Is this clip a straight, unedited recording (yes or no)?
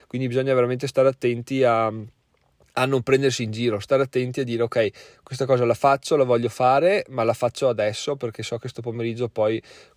yes